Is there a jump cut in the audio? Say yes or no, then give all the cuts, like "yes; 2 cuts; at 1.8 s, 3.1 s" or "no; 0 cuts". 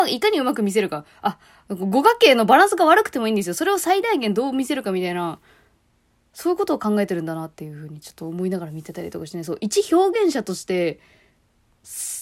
no; 0 cuts